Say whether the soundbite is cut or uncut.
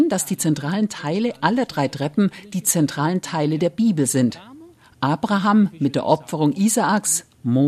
uncut